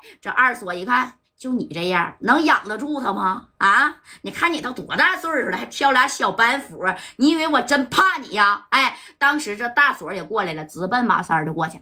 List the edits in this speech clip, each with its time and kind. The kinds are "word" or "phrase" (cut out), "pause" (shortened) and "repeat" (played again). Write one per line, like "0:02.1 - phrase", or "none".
0:01.2 - pause